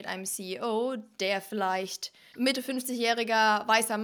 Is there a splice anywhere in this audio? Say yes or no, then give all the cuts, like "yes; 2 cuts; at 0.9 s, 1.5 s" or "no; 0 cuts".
yes; 1 cut; at 2.3 s